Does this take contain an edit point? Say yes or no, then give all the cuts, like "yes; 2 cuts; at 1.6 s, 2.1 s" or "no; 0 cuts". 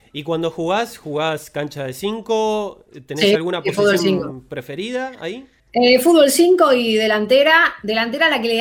yes; 1 cut; at 5.6 s